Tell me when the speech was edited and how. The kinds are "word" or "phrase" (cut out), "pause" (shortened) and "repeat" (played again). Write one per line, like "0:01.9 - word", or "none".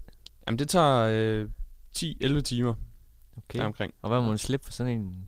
none